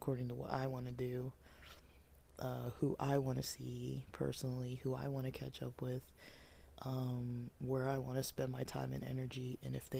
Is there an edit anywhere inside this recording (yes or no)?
no